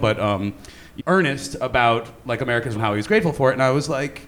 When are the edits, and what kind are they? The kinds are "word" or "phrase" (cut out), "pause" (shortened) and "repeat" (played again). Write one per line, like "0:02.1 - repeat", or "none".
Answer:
0:01.0 - word
0:02.8 - word